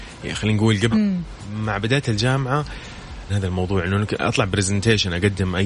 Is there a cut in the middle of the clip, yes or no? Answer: yes